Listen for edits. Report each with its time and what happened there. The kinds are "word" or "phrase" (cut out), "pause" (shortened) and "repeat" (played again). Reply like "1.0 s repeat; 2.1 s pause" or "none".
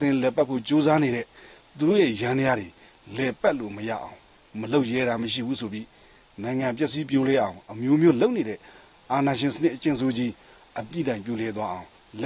none